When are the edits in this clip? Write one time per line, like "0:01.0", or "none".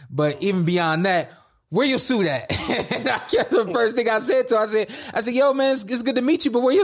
none